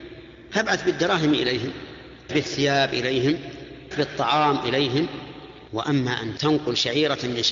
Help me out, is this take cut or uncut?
cut